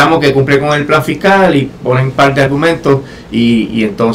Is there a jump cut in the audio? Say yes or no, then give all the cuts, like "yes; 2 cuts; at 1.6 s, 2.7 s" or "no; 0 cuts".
no; 0 cuts